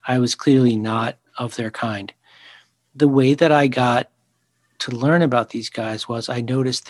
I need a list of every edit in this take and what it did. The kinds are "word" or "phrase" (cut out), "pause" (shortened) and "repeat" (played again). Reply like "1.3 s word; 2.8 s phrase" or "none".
none